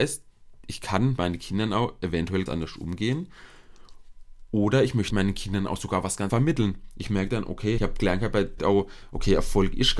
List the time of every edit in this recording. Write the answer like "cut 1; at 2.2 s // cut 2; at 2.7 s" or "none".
cut 1; at 1.2 s // cut 2; at 2.5 s // cut 3; at 5.1 s // cut 4; at 6.3 s // cut 5; at 7.8 s // cut 6; at 8.6 s

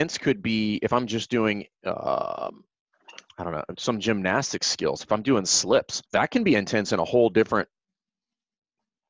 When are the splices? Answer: cut 1; at 6.1 s

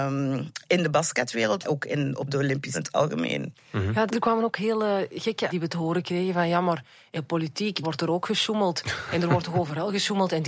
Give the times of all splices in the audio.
cut 1; at 1.6 s // cut 2; at 2.7 s // cut 3; at 4.1 s // cut 4; at 5.5 s // cut 5; at 7.2 s // cut 6; at 7.8 s

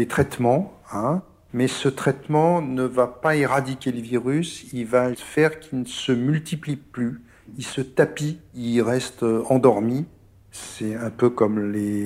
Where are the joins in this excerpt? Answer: cut 1; at 5.1 s

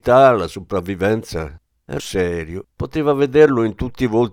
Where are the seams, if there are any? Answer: cut 1; at 2.0 s // cut 2; at 2.7 s

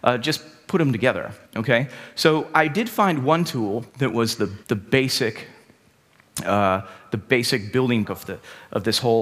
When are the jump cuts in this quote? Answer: cut 1; at 1.4 s // cut 2; at 3.9 s // cut 3; at 4.6 s // cut 4; at 8.0 s

